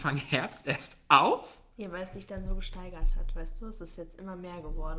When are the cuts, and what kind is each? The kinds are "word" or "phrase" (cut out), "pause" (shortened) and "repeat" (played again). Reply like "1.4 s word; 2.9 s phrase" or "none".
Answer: none